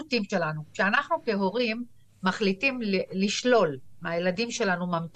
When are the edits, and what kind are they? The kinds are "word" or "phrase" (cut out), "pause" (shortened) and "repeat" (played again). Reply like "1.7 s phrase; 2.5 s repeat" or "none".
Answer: none